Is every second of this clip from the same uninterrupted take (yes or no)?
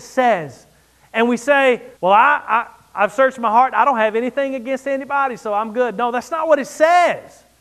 no